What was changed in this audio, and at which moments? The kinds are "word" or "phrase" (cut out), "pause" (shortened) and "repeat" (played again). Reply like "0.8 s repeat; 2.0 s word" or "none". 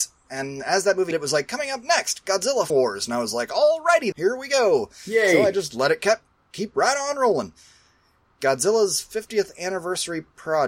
1.1 s word; 2.7 s word; 4.1 s word